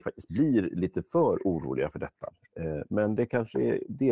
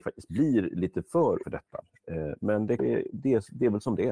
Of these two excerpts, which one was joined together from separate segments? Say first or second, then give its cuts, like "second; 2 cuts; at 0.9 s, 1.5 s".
second; 2 cuts; at 1.4 s, 2.8 s